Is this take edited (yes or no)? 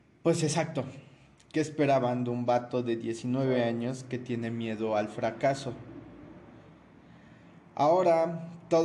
no